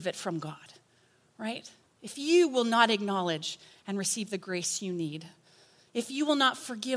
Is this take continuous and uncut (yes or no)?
yes